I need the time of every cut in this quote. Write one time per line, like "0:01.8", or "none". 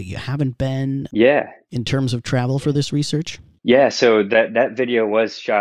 none

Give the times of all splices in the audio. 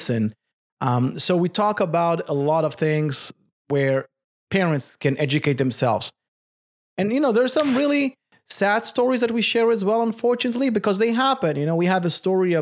none

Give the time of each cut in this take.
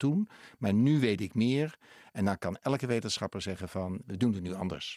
0:04.0

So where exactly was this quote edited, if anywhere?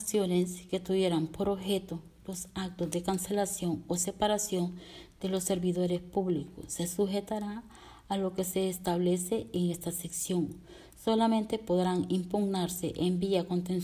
none

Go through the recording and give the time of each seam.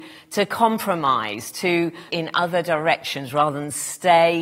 0:02.1

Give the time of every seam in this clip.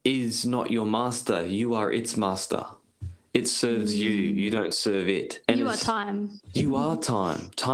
0:05.4

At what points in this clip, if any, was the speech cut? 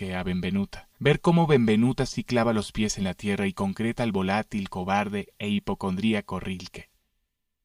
0:00.9

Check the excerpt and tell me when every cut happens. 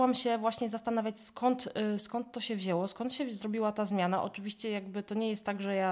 none

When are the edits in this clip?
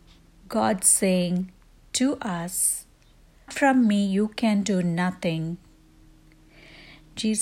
0:03.5

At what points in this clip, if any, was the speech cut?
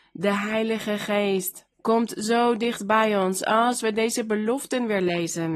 0:01.7

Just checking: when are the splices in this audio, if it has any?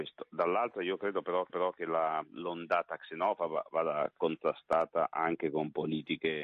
0:01.5

